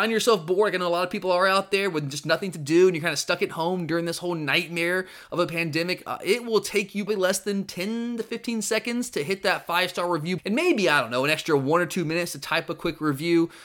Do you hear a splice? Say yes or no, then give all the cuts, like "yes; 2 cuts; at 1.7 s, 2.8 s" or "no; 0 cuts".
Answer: yes; 2 cuts; at 7.1 s, 10.4 s